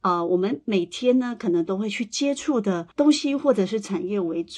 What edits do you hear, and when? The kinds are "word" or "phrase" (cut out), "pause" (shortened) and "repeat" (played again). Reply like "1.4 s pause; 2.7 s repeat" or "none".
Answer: 2.9 s pause